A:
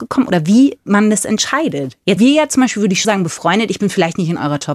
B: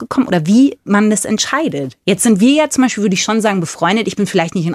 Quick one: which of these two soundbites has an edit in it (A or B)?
A